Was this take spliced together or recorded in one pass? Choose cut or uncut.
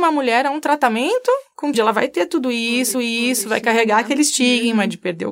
cut